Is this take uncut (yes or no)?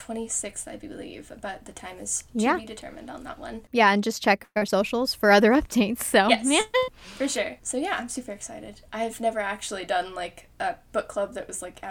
yes